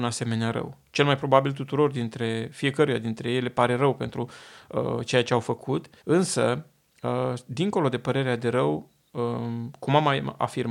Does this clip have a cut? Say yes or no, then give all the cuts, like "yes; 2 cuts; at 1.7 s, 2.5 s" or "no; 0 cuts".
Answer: yes; 1 cut; at 6.0 s